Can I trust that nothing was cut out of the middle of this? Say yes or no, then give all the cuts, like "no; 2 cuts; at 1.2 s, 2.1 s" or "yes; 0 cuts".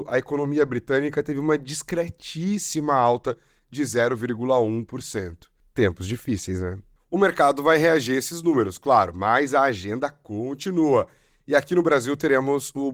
yes; 0 cuts